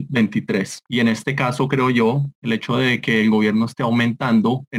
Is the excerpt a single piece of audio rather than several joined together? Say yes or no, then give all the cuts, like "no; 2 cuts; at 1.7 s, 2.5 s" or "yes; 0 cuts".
yes; 0 cuts